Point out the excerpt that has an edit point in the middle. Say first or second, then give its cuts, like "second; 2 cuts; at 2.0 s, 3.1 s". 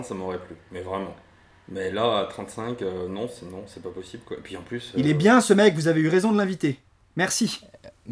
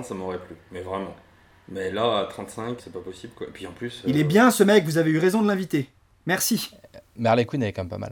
second; 1 cut; at 2.8 s